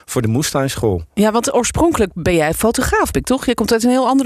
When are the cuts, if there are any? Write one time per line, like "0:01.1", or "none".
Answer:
0:03.1